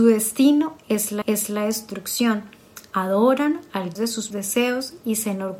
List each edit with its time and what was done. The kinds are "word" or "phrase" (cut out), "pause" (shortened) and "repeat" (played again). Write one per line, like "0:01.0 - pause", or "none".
0:01.2 - repeat
0:04.0 - word
0:04.3 - word